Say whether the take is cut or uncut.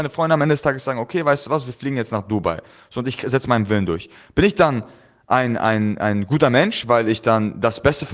uncut